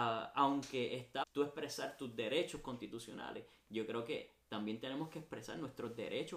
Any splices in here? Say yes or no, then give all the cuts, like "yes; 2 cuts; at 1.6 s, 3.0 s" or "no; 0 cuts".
yes; 1 cut; at 1.2 s